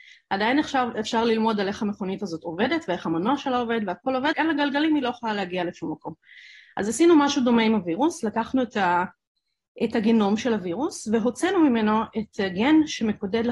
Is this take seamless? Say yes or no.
no